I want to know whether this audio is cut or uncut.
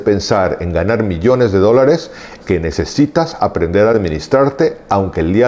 cut